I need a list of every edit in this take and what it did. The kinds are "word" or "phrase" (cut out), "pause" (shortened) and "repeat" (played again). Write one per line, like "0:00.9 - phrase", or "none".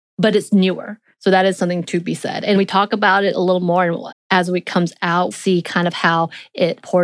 0:02.6 - word
0:04.1 - word
0:05.3 - word